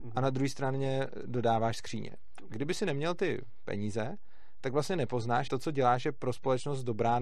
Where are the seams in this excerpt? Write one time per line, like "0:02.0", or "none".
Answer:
0:05.5